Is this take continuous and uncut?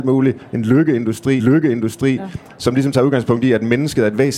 no; 1 cut; at 1.4 s

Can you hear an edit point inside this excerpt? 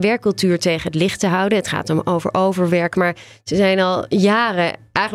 no; 0 cuts

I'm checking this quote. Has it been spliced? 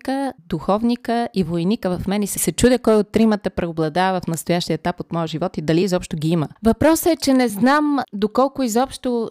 no; 0 cuts

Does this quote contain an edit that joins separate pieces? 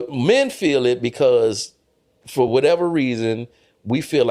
no; 0 cuts

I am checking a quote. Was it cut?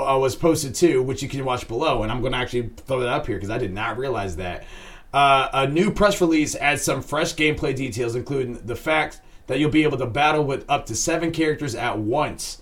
no; 0 cuts

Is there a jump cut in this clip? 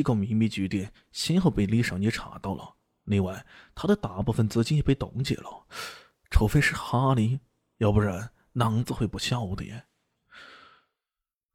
no; 0 cuts

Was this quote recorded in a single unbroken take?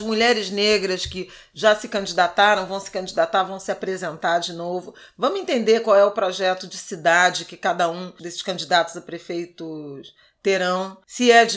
yes; 0 cuts

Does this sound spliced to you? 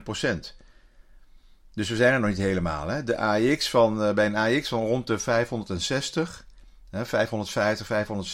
no; 0 cuts

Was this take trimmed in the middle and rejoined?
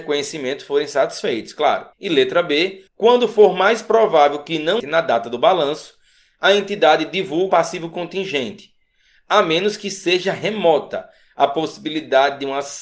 yes; 4 cuts; at 1.9 s, 2.9 s, 4.8 s, 7.5 s

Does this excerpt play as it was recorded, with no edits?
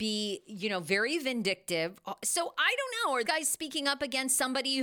no; 1 cut; at 3.2 s

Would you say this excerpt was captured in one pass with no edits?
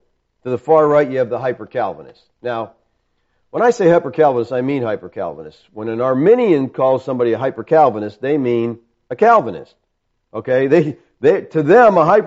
yes; 0 cuts

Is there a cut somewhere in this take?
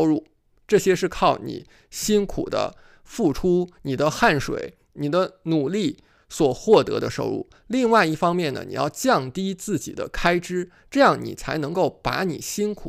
no; 0 cuts

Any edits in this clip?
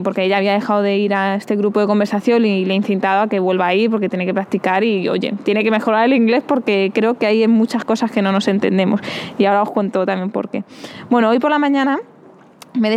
no; 0 cuts

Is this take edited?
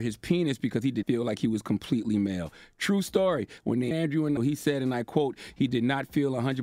yes; 3 cuts; at 1.0 s, 3.9 s, 4.4 s

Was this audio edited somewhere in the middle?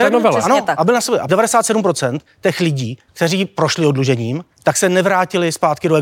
yes; 3 cuts; at 1.3 s, 3.1 s, 4.5 s

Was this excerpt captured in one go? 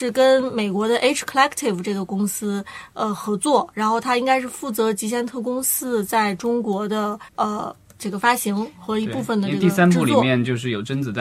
no; 1 cut; at 7.3 s

